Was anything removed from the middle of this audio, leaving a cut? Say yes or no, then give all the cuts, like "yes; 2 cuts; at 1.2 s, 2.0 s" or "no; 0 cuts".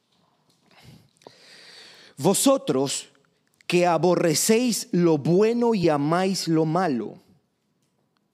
no; 0 cuts